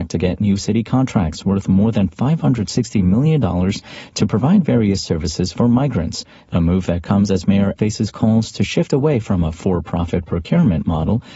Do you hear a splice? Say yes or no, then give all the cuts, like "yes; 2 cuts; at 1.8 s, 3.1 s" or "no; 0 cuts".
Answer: yes; 1 cut; at 7.8 s